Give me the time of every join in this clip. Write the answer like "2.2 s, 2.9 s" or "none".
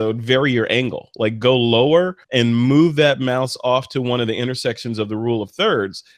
2.2 s

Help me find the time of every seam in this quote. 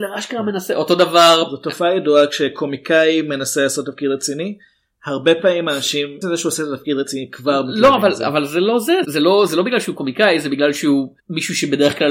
6.2 s, 9.0 s, 11.2 s

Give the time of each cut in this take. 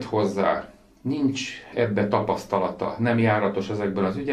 none

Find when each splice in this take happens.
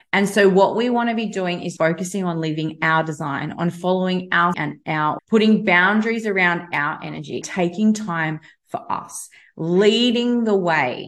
1.8 s, 4.5 s, 5.2 s, 7.4 s

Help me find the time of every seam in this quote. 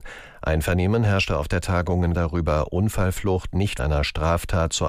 2.1 s, 3.8 s

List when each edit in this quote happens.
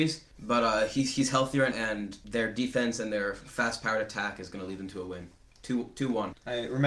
1.7 s

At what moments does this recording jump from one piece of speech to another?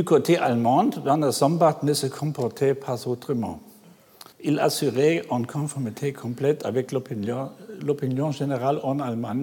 4.3 s

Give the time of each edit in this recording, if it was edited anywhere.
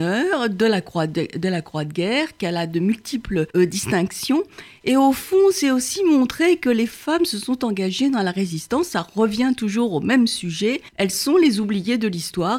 3.5 s, 10.9 s

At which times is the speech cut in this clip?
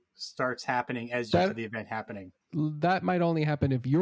1.3 s, 2.4 s

